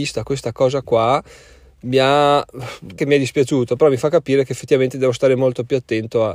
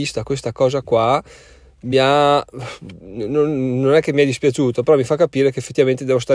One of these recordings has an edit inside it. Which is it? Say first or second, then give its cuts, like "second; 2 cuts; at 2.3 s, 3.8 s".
first; 1 cut; at 3.0 s